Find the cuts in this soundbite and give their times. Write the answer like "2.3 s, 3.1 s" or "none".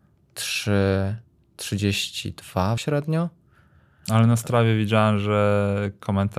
2.8 s